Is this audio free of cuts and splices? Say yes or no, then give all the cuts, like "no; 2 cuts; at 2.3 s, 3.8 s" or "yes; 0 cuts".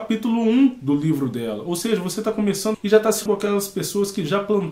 no; 2 cuts; at 2.7 s, 3.3 s